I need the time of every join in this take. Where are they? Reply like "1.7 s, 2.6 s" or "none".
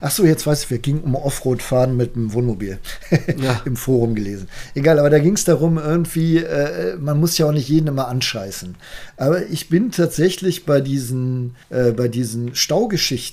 11.6 s